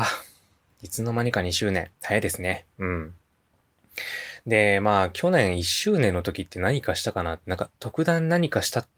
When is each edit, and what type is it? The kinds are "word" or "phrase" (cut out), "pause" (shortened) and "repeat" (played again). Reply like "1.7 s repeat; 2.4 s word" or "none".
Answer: 2.0 s pause; 2.7 s pause; 7.8 s pause